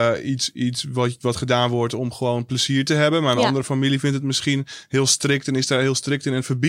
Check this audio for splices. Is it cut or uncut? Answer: uncut